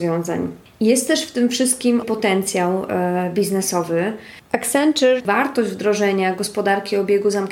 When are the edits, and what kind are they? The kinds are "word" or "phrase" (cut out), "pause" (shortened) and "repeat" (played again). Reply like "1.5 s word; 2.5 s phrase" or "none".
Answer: 2.0 s word; 5.2 s word